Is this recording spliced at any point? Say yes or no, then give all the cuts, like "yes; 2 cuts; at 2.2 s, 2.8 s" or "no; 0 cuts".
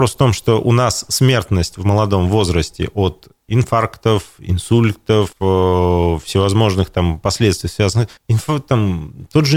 yes; 2 cuts; at 5.3 s, 8.2 s